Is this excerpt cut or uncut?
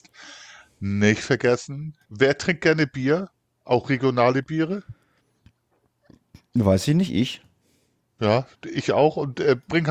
cut